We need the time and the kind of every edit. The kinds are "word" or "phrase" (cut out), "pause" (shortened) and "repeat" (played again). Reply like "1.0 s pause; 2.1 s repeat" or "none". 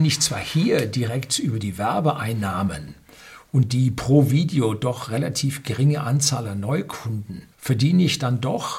7.5 s pause

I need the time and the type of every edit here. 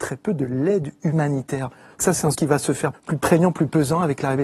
2.0 s word; 2.3 s word; 2.9 s word

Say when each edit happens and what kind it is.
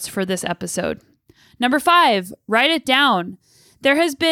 none

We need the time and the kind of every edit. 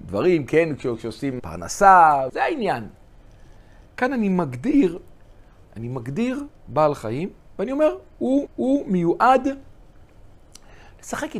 1.4 s word; 2.3 s word; 5.6 s phrase; 8.5 s repeat

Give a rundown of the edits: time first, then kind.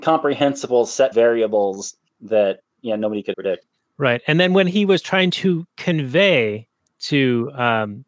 1.1 s word; 3.3 s word

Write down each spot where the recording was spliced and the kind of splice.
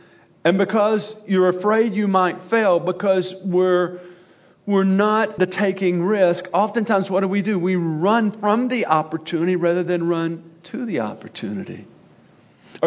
5.4 s word

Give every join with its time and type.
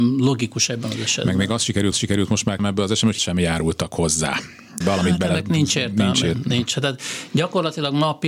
1.9 s repeat; 2.6 s word; 3.2 s word; 4.8 s word

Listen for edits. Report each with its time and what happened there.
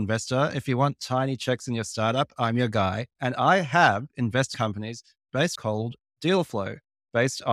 3.1 s pause; 4.5 s word; 5.5 s word

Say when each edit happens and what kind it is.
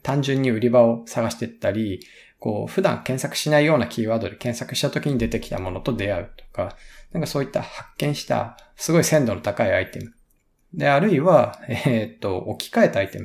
none

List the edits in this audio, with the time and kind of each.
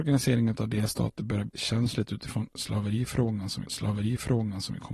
1.5 s word; 3.6 s repeat

